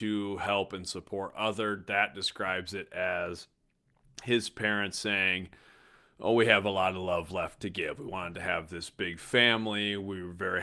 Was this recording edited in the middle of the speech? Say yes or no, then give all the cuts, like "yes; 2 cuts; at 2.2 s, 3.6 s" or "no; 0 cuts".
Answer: no; 0 cuts